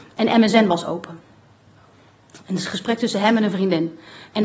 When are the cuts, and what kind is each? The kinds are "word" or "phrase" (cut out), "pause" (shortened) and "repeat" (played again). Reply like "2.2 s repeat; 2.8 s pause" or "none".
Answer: none